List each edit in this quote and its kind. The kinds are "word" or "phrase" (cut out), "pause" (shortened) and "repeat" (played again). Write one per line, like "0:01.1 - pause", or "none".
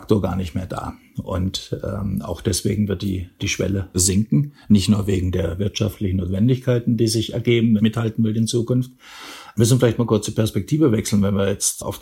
0:03.9 - word
0:07.8 - word